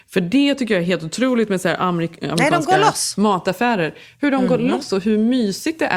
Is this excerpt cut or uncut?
uncut